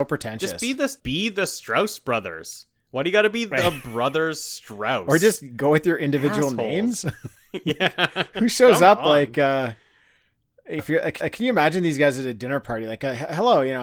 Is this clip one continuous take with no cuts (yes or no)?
no